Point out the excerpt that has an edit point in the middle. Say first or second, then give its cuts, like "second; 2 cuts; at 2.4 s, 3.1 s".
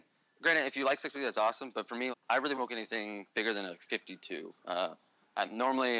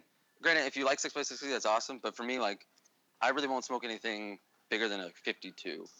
first; 5 cuts; at 1.1 s, 2.1 s, 2.5 s, 3.3 s, 4.6 s